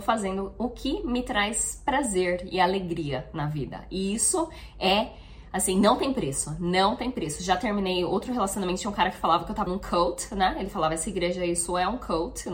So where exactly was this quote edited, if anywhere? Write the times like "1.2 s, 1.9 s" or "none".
9.7 s